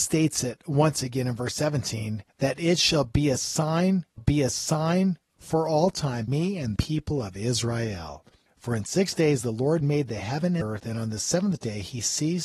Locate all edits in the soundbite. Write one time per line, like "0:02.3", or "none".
0:02.3
0:04.2
0:06.3
0:06.8
0:08.5
0:10.6